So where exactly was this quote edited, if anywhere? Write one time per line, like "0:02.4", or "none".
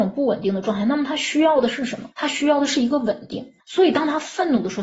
0:02.1
0:03.6